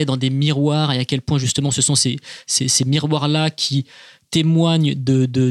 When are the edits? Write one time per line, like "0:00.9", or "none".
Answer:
none